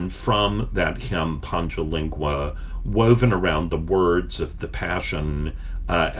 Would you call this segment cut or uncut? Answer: uncut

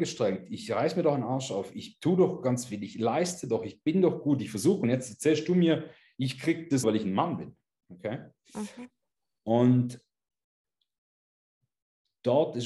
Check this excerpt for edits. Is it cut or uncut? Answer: cut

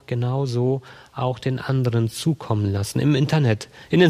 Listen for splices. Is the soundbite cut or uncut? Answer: uncut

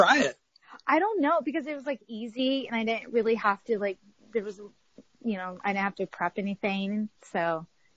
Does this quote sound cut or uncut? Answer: uncut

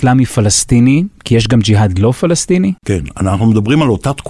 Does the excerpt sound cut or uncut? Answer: cut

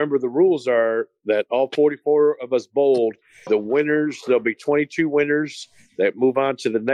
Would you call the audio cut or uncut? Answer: uncut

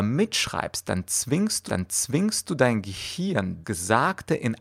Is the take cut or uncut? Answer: cut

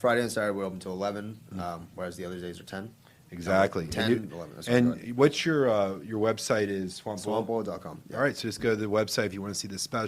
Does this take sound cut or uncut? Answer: uncut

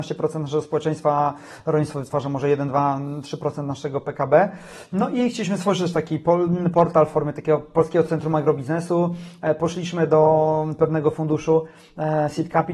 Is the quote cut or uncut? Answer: uncut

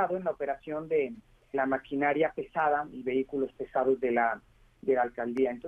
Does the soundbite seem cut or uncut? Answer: cut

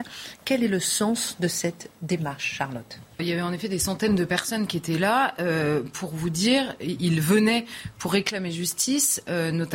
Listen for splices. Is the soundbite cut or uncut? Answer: cut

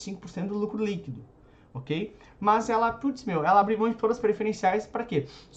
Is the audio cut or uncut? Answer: uncut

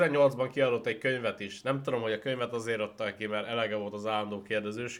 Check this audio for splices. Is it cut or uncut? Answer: uncut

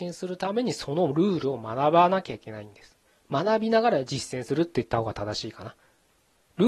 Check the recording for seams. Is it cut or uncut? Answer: uncut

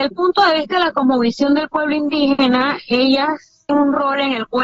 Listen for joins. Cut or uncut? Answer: cut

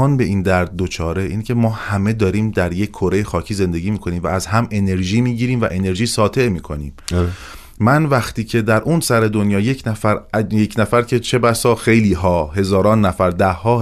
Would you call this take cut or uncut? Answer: uncut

